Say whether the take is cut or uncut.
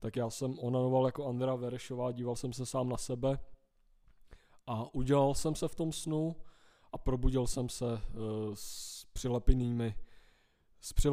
uncut